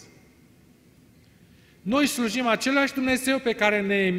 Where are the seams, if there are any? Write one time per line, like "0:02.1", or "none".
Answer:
none